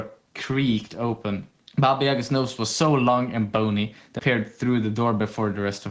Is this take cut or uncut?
cut